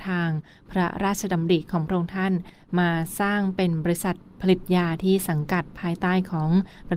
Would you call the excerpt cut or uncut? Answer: uncut